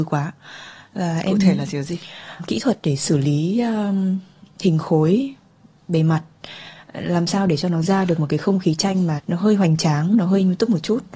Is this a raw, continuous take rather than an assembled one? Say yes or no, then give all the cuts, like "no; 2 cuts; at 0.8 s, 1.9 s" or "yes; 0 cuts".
no; 2 cuts; at 2.4 s, 9.2 s